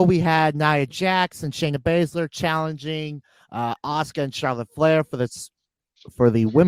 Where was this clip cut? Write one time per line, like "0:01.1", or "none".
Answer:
none